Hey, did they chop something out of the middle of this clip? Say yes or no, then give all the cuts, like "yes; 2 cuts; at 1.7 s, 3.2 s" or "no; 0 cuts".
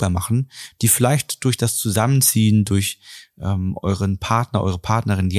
no; 0 cuts